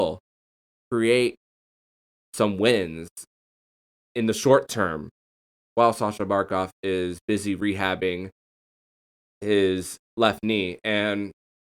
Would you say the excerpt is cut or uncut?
uncut